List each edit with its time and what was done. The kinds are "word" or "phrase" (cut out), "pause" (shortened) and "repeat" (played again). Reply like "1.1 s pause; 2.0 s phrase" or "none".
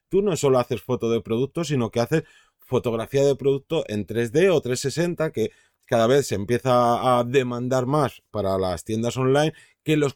none